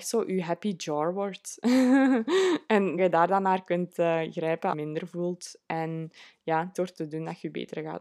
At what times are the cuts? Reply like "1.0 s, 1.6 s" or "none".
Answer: 3.0 s, 4.7 s, 6.7 s